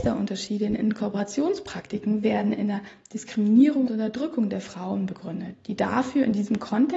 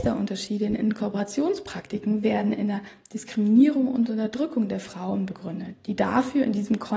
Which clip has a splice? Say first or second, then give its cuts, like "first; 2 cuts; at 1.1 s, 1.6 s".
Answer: first; 1 cut; at 3.9 s